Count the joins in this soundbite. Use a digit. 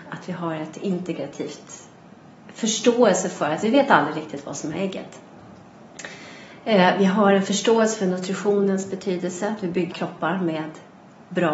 2